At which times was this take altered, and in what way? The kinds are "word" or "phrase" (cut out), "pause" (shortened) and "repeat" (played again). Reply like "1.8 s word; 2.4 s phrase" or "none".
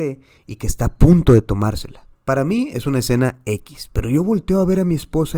2.1 s pause